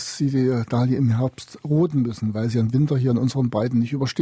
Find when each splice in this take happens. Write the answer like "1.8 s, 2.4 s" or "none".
none